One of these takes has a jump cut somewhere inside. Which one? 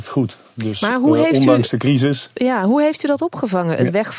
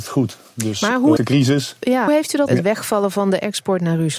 second; 3 cuts; at 1.2 s, 2.1 s, 2.5 s

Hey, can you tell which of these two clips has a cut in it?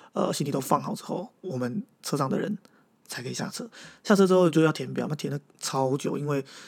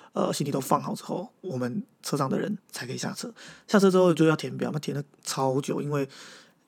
second; 1 cut; at 2.6 s

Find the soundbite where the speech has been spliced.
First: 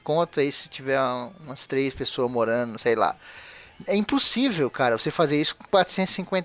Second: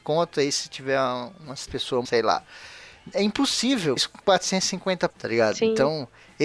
second; 4 cuts; at 1.7 s, 2.0 s, 4.0 s, 5.1 s

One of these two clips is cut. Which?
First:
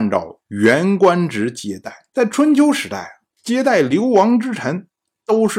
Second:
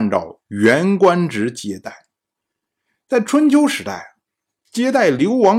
first; 2 cuts; at 2.1 s, 3.3 s

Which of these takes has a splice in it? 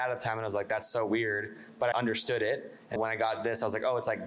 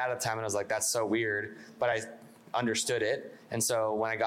first; 2 cuts; at 1.9 s, 3.0 s

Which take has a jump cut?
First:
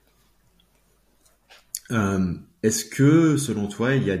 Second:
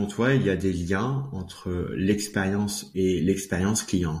second; 1 cut; at 2.9 s

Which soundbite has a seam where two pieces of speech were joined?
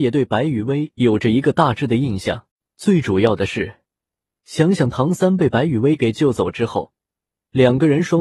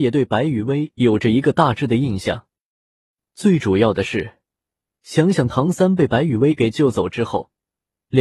first; 1 cut; at 2.5 s

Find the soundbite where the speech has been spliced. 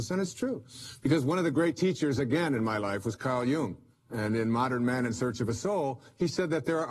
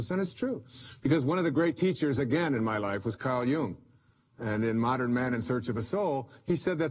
first; 1 cut; at 3.9 s

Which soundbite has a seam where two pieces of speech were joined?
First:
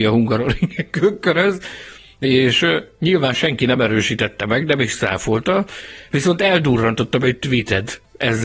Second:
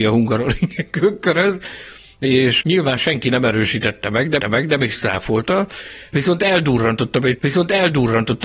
second; 3 cuts; at 2.6 s, 4.4 s, 7.4 s

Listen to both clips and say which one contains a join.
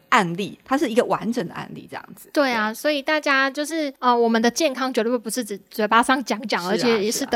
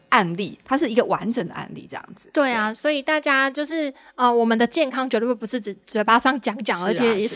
first; 1 cut; at 4.0 s

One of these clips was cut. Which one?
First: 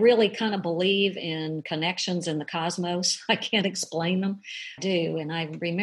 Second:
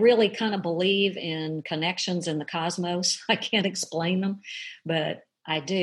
first; 1 cut; at 4.8 s

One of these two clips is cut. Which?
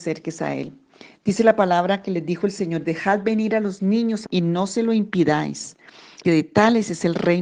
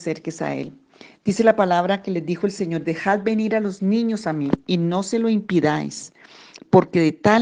first; 2 cuts; at 4.3 s, 6.2 s

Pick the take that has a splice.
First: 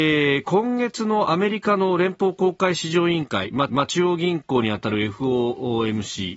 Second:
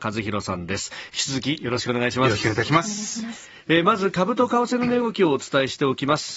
first; 1 cut; at 3.7 s

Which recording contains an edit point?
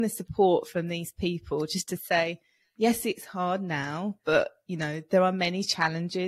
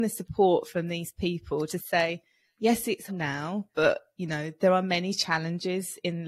second; 2 cuts; at 1.7 s, 3.1 s

